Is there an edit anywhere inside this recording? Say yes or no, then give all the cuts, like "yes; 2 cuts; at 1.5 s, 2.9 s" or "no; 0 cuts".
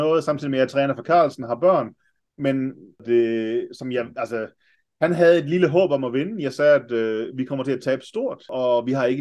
no; 0 cuts